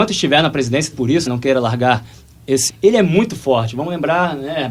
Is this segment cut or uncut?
cut